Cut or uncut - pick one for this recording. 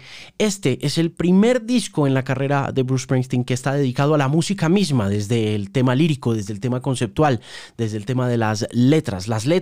uncut